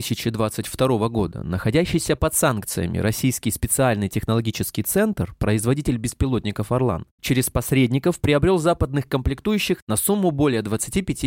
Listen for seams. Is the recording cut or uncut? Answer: uncut